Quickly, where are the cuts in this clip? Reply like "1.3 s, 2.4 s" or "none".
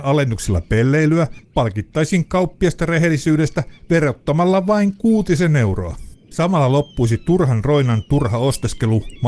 1.4 s, 6.2 s